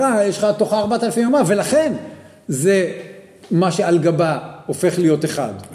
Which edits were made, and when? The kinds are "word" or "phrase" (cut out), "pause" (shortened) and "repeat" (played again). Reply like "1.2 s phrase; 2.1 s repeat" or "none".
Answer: none